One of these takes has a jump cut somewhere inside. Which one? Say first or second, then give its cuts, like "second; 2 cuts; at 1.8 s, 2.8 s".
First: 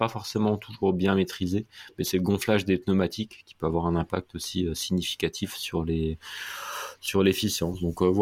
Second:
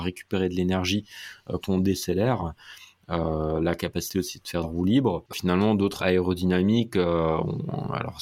second; 4 cuts; at 1.6 s, 4.6 s, 5.3 s, 6.0 s